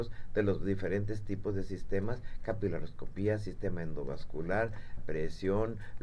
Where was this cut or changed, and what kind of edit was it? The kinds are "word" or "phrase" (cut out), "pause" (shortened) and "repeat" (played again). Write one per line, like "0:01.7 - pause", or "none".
0:05.0 - word